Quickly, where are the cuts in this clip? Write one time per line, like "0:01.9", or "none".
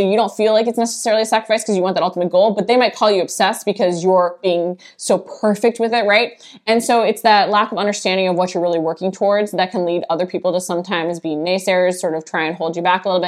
none